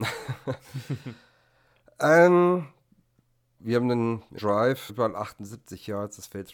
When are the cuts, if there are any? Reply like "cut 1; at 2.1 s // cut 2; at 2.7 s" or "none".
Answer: cut 1; at 3.6 s // cut 2; at 4.4 s // cut 3; at 4.9 s

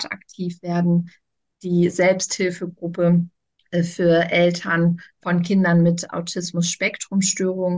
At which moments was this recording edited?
cut 1; at 5.2 s

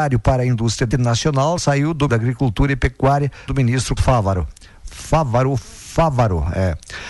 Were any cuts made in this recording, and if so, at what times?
cut 1; at 0.9 s // cut 2; at 1.6 s // cut 3; at 2.1 s // cut 4; at 3.5 s // cut 5; at 4.0 s // cut 6; at 5.6 s

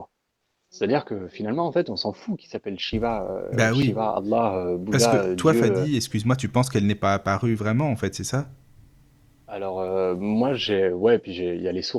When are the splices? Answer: none

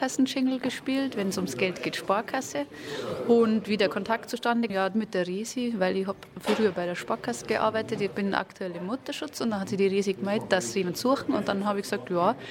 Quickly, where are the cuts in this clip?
cut 1; at 4.7 s

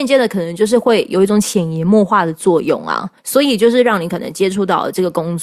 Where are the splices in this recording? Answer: cut 1; at 3.2 s

